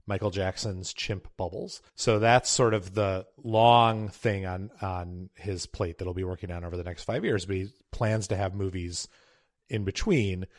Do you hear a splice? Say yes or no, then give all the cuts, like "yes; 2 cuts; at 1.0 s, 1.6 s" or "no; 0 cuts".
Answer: yes; 1 cut; at 1.9 s